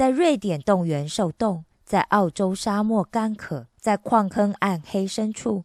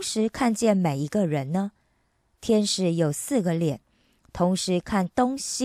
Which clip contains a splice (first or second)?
first